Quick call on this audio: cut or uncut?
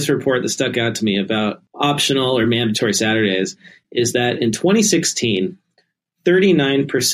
uncut